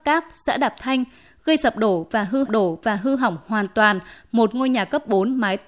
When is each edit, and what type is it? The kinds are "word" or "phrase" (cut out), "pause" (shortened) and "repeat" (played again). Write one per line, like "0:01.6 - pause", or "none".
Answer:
0:02.5 - repeat